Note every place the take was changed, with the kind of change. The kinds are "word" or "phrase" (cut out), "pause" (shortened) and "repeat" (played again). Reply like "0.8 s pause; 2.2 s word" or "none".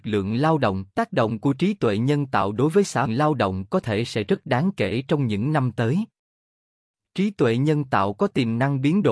0.9 s pause; 3.1 s phrase